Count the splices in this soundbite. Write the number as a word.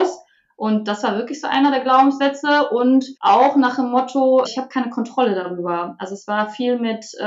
two